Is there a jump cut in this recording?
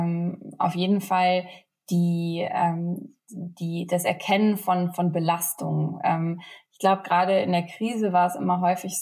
no; 0 cuts

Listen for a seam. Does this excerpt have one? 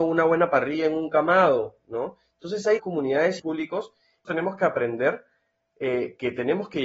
yes; 3 cuts; at 2.8 s, 3.4 s, 4.2 s

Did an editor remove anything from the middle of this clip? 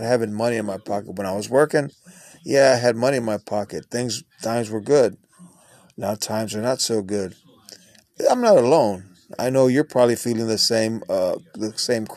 no; 0 cuts

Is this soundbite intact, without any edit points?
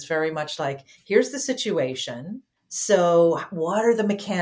no; 1 cut; at 2.6 s

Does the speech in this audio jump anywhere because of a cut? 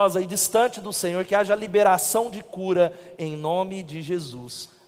no; 0 cuts

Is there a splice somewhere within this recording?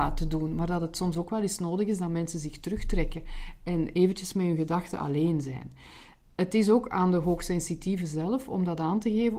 no; 0 cuts

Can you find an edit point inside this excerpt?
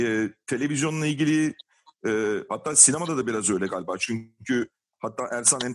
no; 0 cuts

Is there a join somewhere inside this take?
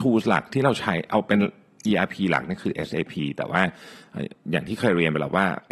no; 0 cuts

